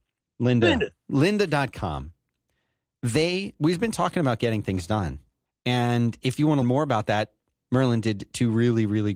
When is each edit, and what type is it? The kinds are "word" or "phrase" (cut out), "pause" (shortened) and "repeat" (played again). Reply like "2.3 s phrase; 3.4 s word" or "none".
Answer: 5.5 s pause; 6.6 s word